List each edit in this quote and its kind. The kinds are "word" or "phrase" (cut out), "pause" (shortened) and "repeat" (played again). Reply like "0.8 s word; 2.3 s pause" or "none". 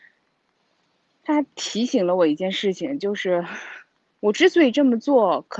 4.0 s pause